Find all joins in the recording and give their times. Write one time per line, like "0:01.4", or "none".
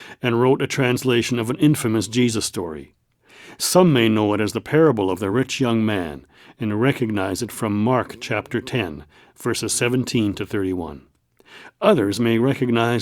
none